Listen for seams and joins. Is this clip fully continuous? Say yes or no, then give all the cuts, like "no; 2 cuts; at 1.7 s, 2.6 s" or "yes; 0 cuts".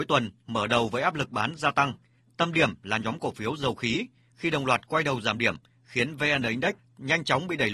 yes; 0 cuts